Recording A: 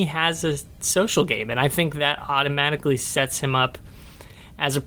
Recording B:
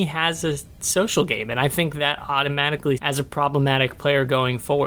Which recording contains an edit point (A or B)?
B